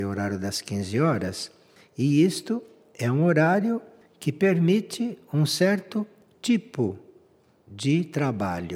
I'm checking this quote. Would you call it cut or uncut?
uncut